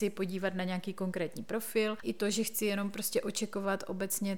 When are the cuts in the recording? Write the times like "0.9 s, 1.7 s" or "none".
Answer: 2.0 s